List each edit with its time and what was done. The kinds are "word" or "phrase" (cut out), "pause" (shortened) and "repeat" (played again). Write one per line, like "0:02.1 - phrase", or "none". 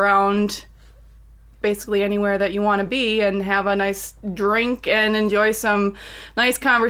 none